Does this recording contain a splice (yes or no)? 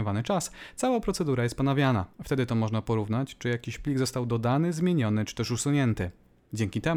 yes